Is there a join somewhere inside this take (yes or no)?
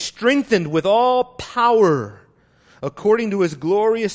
no